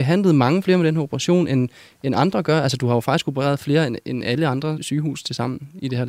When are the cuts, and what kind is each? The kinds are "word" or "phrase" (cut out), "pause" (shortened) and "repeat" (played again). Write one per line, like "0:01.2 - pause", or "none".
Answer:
none

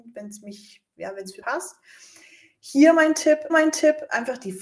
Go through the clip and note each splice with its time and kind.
0:01.4 - word
0:03.5 - repeat

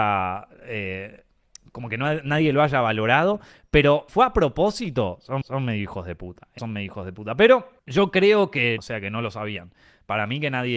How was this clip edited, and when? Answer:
0:04.1 - word
0:05.4 - repeat
0:06.6 - phrase
0:07.8 - pause
0:08.8 - word

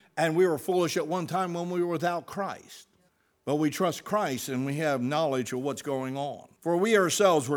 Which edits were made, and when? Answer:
0:03.1 - pause
0:06.6 - pause

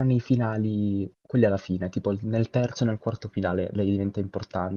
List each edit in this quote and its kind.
0:01.2 - pause

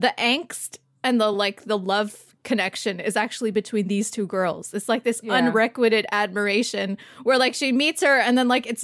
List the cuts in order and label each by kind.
none

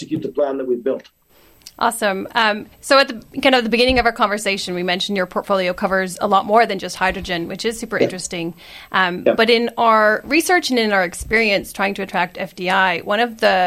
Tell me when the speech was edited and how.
0:02.7 - pause

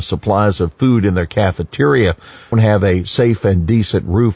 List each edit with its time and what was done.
0:02.5 - word

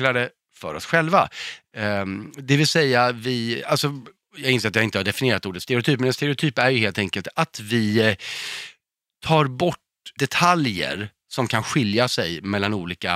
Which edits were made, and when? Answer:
none

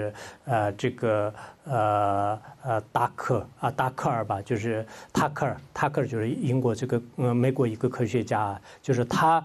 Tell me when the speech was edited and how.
0:02.9 - pause

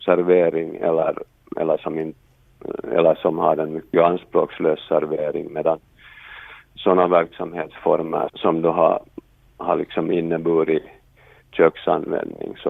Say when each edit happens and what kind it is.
0:08.3 - word

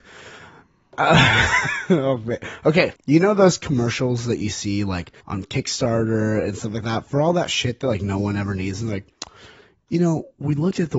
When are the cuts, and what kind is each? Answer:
0:03.0 - pause
0:05.2 - pause

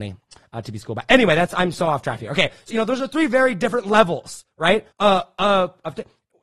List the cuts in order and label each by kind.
0:02.7 - phrase
0:04.9 - pause

